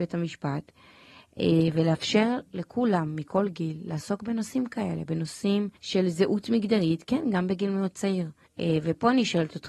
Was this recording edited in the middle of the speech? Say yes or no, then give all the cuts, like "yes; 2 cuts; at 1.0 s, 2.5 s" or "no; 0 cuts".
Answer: yes; 2 cuts; at 5.8 s, 8.5 s